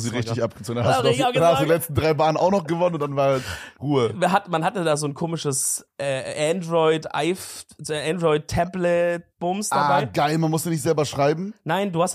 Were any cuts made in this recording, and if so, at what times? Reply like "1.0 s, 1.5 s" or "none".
3.8 s, 9.3 s